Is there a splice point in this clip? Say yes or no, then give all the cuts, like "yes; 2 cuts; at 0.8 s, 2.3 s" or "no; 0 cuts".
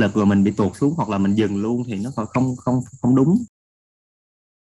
no; 0 cuts